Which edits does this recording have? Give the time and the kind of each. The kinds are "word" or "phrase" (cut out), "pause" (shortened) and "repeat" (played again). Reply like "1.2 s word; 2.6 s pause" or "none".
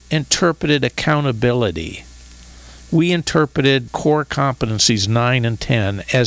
3.9 s word